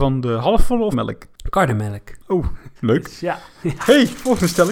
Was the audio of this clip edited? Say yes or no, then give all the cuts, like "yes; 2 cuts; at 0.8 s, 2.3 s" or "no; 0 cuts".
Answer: yes; 2 cuts; at 0.9 s, 2.8 s